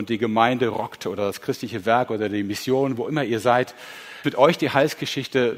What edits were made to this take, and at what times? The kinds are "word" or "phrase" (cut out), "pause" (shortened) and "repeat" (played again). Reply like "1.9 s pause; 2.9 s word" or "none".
4.2 s word